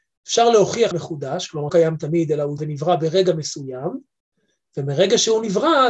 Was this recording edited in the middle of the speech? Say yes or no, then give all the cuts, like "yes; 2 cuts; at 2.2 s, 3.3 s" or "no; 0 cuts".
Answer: yes; 3 cuts; at 0.9 s, 1.7 s, 2.6 s